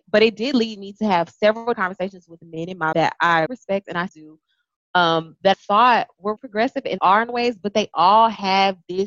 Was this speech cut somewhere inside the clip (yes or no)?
yes